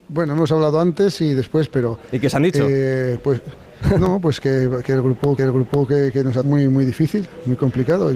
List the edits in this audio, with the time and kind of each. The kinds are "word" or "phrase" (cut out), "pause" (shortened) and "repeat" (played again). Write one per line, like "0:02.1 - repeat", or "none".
0:04.4 - word
0:05.4 - repeat
0:06.4 - phrase